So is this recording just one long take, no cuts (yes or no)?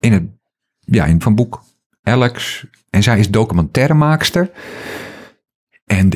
no